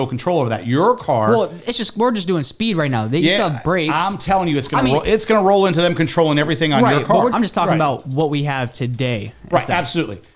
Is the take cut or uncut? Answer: cut